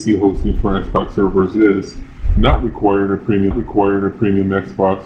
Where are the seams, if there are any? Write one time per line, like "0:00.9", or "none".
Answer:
0:03.5